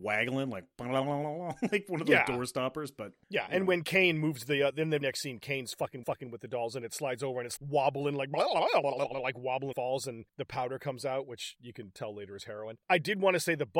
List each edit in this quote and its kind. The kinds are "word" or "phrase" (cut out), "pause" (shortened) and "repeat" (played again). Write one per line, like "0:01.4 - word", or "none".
0:03.2 - pause
0:05.0 - word
0:06.0 - repeat
0:07.6 - word
0:09.7 - phrase
0:10.3 - pause
0:12.8 - pause